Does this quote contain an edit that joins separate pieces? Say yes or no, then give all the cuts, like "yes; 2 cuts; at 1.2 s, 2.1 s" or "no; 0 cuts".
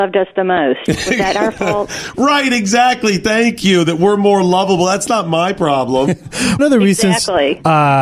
yes; 1 cut; at 6.6 s